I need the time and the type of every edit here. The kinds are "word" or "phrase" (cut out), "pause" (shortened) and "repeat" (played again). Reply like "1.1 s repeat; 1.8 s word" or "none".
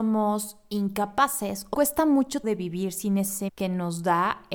1.7 s word; 2.4 s word; 3.5 s word